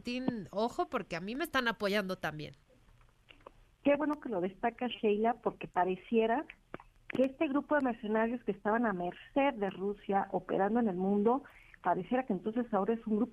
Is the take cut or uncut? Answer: uncut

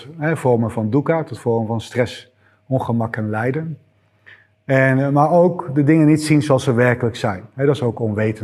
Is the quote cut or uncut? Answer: uncut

